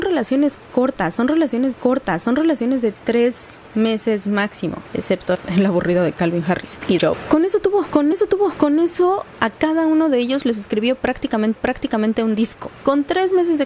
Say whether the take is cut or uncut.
cut